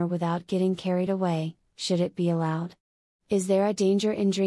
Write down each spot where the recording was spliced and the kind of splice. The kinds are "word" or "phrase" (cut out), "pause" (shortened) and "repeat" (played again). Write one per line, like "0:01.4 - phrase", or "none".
none